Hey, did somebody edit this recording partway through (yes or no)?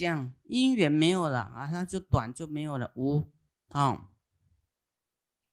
yes